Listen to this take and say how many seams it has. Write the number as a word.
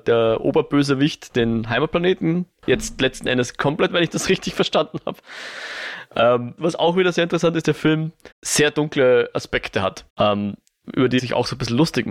six